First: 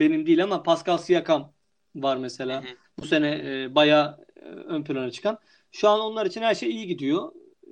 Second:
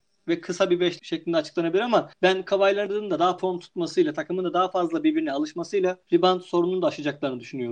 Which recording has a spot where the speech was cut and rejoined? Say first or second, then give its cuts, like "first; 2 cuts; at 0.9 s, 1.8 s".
second; 4 cuts; at 1.0 s, 2.1 s, 3.4 s, 6.0 s